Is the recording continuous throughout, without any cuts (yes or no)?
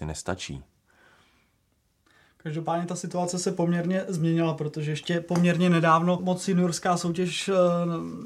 no